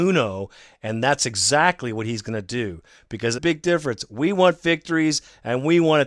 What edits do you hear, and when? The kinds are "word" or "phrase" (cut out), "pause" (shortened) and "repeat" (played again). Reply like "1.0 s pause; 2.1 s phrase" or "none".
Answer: 3.4 s phrase